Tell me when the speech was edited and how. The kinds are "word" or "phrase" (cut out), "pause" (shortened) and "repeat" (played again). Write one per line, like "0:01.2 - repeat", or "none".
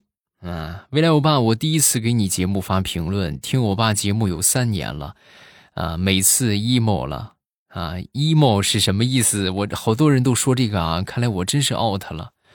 none